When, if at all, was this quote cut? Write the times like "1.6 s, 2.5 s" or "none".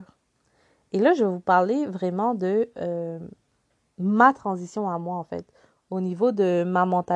none